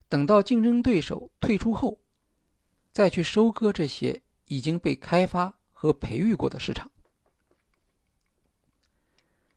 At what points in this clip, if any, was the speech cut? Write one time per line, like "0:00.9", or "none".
none